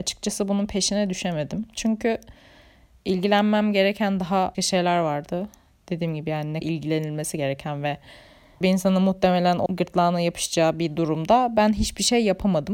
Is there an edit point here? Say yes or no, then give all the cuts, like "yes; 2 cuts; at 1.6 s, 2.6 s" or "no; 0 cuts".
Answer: yes; 4 cuts; at 4.5 s, 6.6 s, 8.6 s, 9.7 s